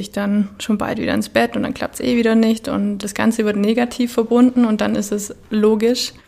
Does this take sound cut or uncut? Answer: uncut